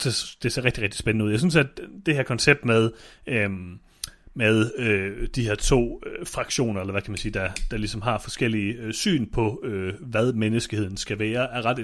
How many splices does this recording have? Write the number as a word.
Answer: zero